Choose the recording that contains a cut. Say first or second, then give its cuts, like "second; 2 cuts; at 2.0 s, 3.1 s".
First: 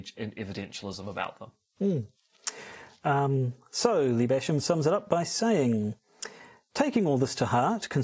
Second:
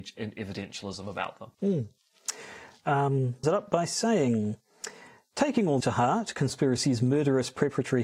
second; 3 cuts; at 1.5 s, 3.4 s, 5.8 s